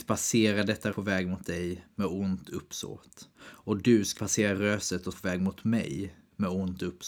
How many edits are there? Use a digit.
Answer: 4